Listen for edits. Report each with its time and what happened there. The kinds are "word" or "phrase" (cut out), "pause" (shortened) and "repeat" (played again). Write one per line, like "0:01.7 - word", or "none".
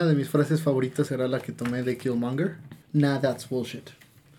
0:01.1 - word
0:02.8 - pause

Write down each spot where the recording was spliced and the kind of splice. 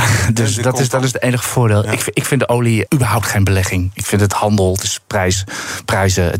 0:02.9 - word

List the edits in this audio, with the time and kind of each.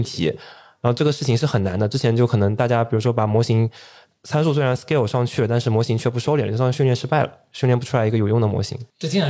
none

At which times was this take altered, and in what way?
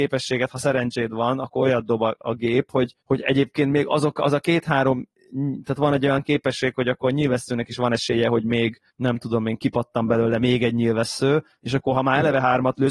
0:03.0 - pause
0:08.9 - pause

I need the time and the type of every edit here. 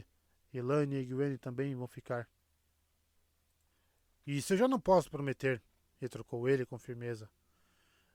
none

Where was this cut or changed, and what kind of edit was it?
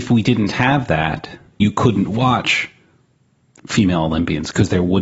0:01.6 - word

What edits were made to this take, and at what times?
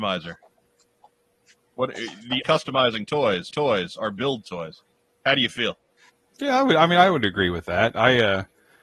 0:02.4 - phrase
0:03.5 - repeat
0:06.1 - pause

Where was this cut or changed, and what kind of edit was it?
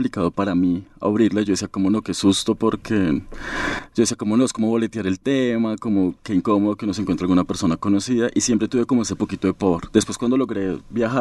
none

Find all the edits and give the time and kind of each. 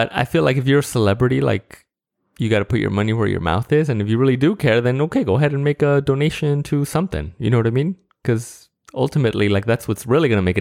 none

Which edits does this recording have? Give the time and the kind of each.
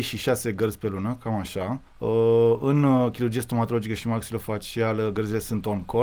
0:01.9 - pause

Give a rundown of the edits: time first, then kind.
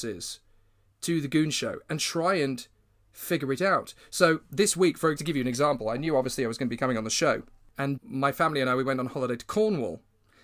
0:05.2 - word
0:08.0 - word

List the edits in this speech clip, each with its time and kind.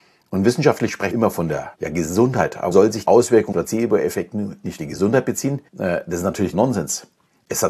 0:01.1 - word
0:01.7 - pause
0:02.7 - word
0:03.0 - word
0:03.5 - word
0:04.8 - phrase
0:05.7 - pause
0:06.5 - word

